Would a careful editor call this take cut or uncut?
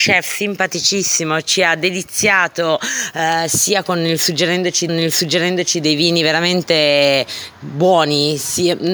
cut